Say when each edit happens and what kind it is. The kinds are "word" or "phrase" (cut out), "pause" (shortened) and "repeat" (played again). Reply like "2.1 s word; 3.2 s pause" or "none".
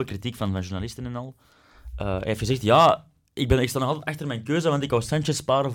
none